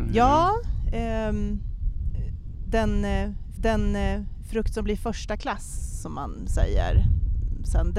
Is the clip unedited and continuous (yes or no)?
no